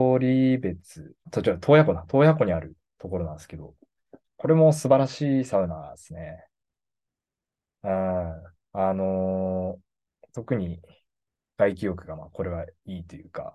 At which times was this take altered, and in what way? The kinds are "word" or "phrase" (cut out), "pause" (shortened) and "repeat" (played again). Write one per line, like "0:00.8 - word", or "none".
0:01.3 - word